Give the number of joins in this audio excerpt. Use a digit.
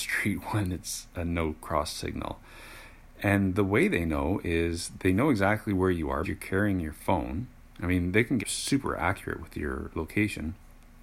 2